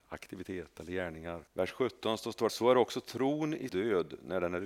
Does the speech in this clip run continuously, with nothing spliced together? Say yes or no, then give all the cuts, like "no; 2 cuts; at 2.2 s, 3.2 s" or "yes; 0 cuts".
no; 3 cuts; at 1.5 s, 2.5 s, 3.7 s